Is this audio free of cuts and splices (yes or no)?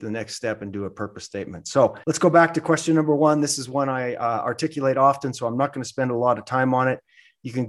no